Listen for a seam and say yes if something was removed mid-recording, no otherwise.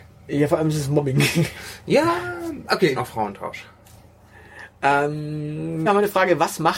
yes